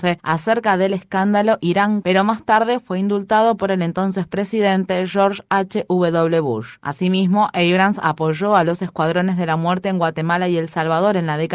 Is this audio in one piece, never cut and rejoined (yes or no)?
no